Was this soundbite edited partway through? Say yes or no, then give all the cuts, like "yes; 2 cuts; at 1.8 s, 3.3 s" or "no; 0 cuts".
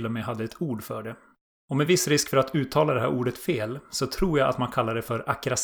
no; 0 cuts